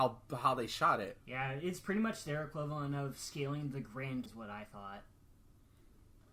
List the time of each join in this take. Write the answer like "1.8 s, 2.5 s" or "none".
1.2 s, 4.3 s